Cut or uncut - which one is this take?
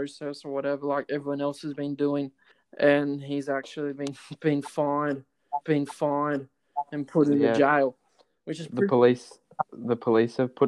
cut